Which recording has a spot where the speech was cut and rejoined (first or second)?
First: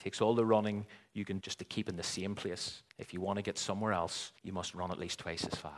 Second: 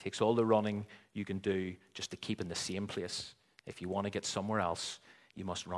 first